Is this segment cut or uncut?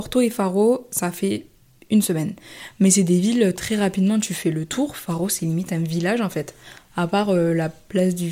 uncut